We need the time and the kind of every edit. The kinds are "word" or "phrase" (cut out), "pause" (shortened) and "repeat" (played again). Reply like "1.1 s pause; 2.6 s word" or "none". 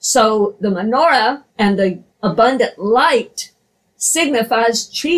1.5 s pause; 2.1 s pause